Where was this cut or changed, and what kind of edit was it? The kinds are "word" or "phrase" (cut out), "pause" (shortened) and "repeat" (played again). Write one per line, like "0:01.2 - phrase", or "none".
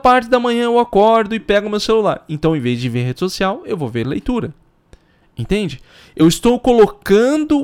none